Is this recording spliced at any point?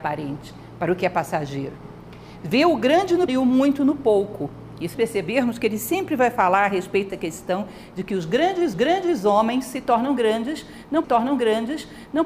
yes; 5 cuts; at 3.3 s, 4.9 s, 7.1 s, 8.7 s, 11.0 s

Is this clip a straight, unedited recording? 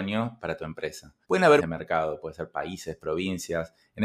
no; 2 cuts; at 1.2 s, 1.6 s

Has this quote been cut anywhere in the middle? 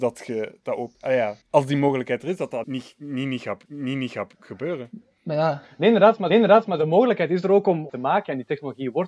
yes; 6 cuts; at 0.9 s, 1.4 s, 2.6 s, 3.7 s, 6.3 s, 7.9 s

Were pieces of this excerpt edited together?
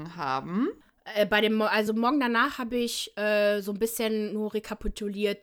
no; 0 cuts

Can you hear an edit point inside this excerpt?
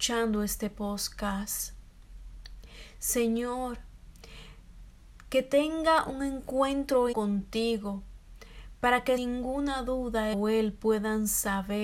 yes; 3 cuts; at 7.1 s, 9.2 s, 10.3 s

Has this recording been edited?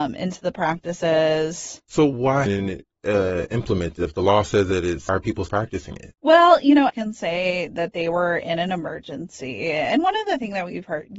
yes; 6 cuts; at 1.8 s, 2.5 s, 5.1 s, 5.5 s, 6.2 s, 6.9 s

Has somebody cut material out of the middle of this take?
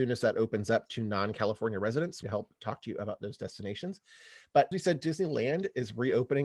yes; 2 cuts; at 2.2 s, 4.7 s

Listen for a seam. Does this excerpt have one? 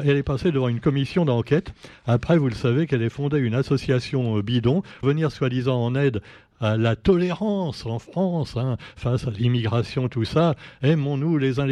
yes; 1 cut; at 5.0 s

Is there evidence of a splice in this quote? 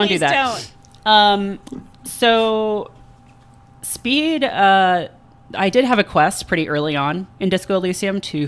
yes; 1 cut; at 1.6 s

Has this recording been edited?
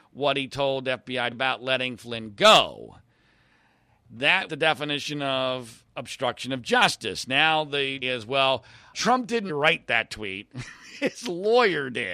yes; 5 cuts; at 1.3 s, 4.5 s, 8.0 s, 8.9 s, 9.5 s

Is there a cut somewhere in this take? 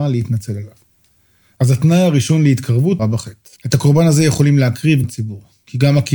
yes; 3 cuts; at 3.0 s, 3.6 s, 5.0 s

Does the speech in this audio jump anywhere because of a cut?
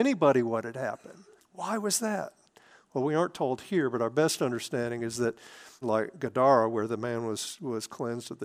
yes; 2 cuts; at 1.4 s, 5.8 s

